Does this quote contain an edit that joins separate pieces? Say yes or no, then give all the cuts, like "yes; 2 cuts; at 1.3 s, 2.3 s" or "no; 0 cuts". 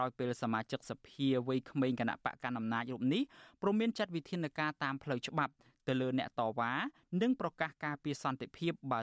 no; 0 cuts